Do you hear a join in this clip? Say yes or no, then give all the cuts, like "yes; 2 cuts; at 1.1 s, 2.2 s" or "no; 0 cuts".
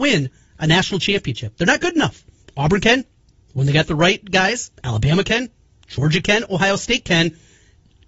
yes; 2 cuts; at 2.4 s, 4.7 s